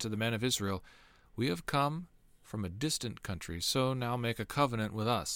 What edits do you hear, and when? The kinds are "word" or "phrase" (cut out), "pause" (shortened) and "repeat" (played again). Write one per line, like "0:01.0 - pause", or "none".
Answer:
none